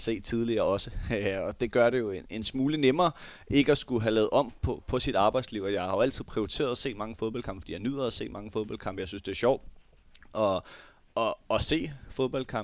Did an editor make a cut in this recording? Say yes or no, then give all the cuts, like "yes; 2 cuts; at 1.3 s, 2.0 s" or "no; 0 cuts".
no; 0 cuts